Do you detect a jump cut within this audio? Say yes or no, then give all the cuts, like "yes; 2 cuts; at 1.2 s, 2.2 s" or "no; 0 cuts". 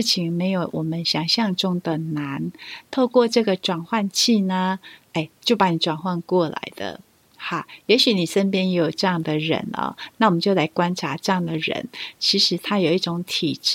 no; 0 cuts